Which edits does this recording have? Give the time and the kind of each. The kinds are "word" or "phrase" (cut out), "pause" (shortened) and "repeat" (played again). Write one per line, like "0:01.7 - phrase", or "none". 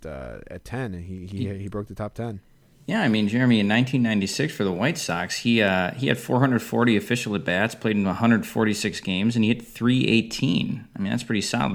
none